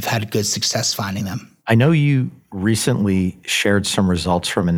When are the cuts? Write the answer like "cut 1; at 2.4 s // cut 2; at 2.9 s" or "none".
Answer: cut 1; at 1.6 s